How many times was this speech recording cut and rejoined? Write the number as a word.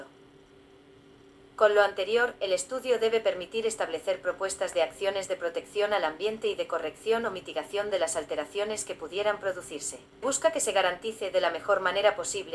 one